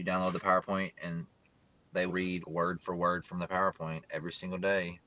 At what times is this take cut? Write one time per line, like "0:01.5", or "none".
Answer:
0:02.1
0:02.4